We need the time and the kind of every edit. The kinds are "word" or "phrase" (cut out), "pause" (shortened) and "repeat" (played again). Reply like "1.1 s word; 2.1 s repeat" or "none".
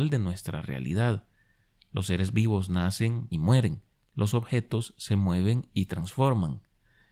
3.3 s phrase; 3.9 s pause